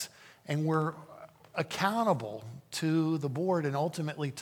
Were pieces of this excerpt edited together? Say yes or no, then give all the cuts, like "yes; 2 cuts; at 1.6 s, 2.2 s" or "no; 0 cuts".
no; 0 cuts